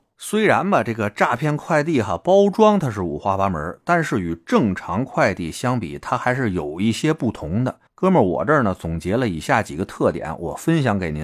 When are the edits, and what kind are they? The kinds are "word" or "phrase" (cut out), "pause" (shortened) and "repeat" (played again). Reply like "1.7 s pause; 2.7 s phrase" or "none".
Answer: 7.9 s pause